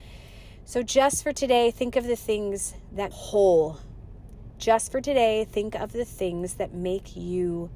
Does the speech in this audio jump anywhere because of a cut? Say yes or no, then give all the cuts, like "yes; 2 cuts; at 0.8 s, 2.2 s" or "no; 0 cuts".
yes; 1 cut; at 3.1 s